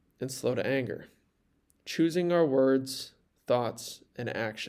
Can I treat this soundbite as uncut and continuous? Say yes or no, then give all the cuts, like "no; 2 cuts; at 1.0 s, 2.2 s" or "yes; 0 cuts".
yes; 0 cuts